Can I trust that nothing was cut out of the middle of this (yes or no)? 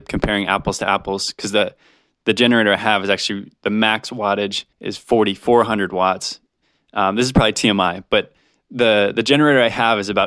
no